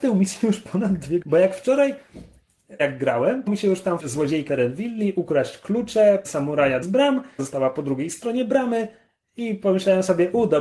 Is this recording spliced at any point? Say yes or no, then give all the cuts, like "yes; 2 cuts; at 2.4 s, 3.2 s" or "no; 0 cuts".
yes; 8 cuts; at 1.2 s, 2.8 s, 3.5 s, 4.0 s, 4.5 s, 6.2 s, 6.8 s, 7.4 s